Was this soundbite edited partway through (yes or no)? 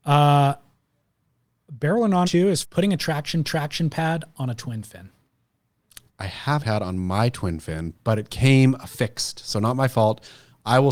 yes